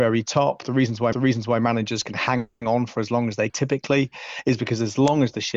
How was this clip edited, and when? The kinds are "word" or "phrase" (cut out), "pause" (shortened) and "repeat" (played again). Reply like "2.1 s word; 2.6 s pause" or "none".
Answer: 1.1 s repeat; 3.5 s word